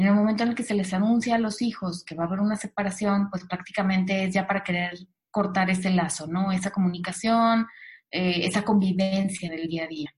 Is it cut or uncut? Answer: uncut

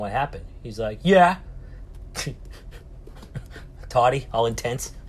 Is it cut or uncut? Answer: uncut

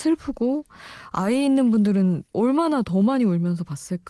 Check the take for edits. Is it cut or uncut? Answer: cut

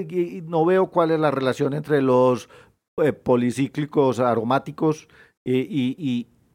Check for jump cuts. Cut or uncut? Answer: uncut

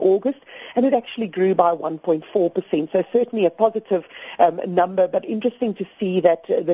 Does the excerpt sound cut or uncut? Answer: uncut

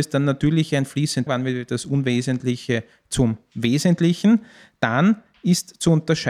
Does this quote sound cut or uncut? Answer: cut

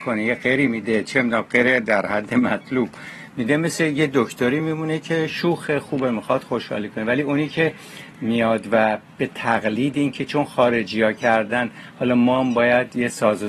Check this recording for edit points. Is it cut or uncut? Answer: uncut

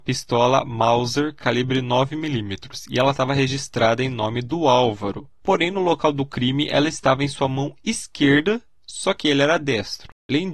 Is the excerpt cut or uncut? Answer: uncut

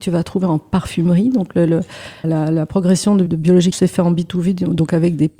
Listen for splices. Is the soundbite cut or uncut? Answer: cut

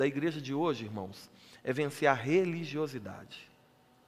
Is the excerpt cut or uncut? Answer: uncut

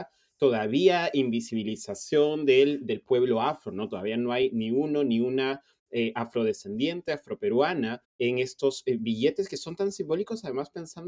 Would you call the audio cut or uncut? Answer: cut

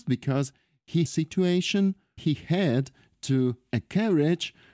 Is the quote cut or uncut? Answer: cut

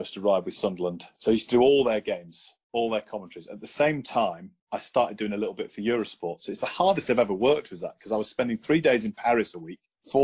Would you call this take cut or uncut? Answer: uncut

